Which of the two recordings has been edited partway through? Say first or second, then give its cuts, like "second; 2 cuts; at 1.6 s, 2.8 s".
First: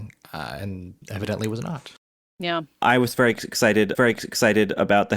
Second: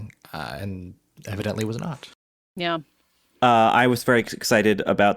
first; 3 cuts; at 1.0 s, 2.8 s, 3.9 s